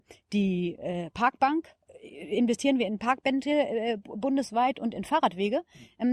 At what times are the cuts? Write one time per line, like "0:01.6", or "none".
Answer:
none

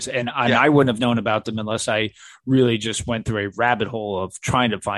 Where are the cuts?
none

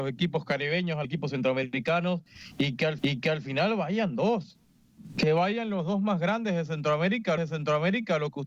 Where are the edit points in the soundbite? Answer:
0:01.0
0:03.0
0:07.4

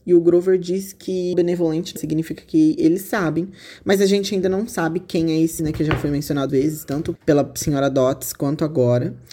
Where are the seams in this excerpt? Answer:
0:01.3
0:02.0
0:05.6
0:06.5
0:07.2

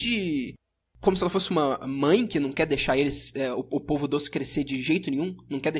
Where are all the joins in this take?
none

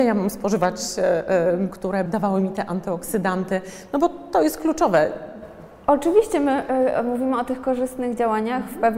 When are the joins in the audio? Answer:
0:01.7
0:02.1

